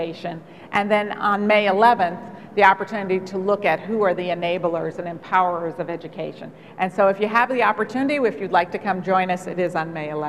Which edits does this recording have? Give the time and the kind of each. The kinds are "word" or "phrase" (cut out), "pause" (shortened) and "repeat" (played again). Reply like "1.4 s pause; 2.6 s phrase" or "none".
none